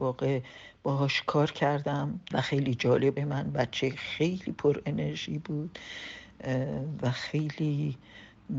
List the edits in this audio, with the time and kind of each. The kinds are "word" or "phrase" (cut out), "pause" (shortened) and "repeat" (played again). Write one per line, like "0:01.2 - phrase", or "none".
0:02.3 - phrase
0:03.2 - phrase